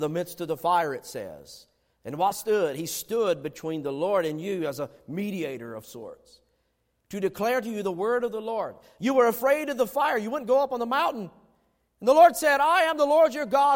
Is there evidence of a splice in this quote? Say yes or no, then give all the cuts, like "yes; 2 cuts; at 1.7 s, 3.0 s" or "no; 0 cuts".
yes; 1 cut; at 2.3 s